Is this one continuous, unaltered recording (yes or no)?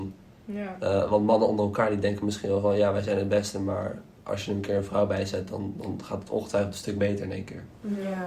yes